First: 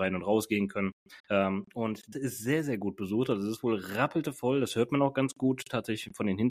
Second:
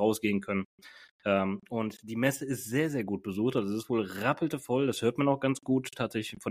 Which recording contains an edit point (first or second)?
first